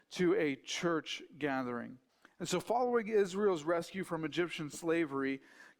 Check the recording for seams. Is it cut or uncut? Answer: cut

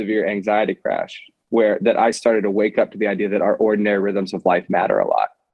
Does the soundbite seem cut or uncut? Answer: uncut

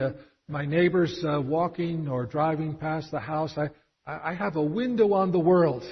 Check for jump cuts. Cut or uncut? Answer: uncut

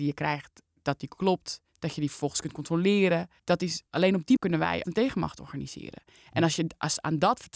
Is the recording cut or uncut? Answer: cut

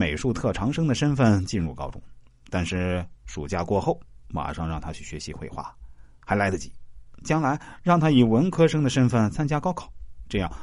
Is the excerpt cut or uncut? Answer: uncut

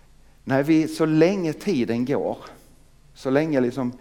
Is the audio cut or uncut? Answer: uncut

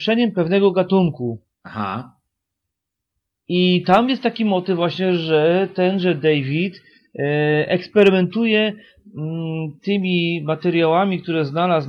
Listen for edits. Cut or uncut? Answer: cut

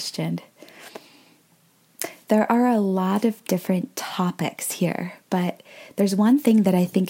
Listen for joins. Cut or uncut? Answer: cut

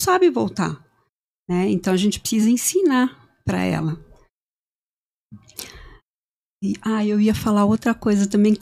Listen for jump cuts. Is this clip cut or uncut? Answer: uncut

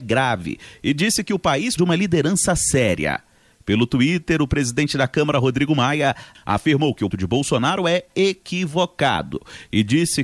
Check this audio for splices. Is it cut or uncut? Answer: cut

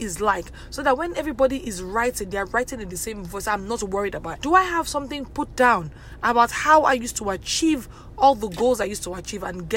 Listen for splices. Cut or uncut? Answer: cut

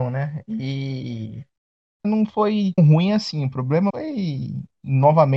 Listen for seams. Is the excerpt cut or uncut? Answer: cut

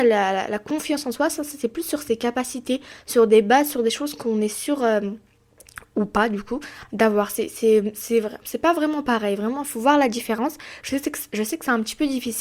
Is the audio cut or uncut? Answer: uncut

